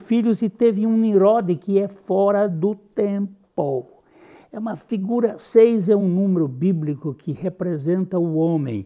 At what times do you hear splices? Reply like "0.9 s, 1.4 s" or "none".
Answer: none

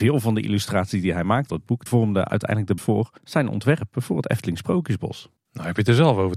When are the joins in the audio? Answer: 1.5 s, 1.9 s, 2.8 s, 3.2 s, 5.4 s

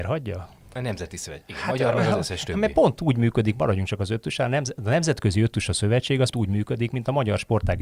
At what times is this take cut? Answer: 6.3 s

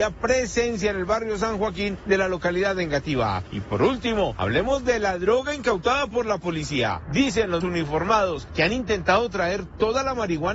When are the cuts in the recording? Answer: 7.6 s

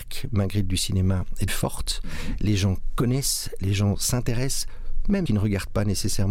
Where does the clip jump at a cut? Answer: 1.5 s, 5.3 s

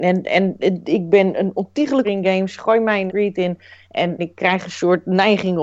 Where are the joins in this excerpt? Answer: 2.0 s, 3.1 s, 4.2 s

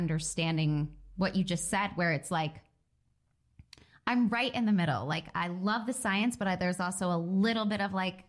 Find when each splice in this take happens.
none

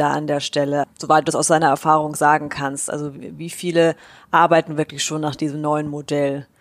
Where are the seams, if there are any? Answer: none

